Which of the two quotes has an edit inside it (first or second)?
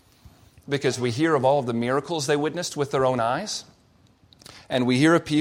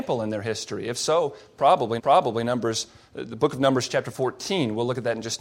second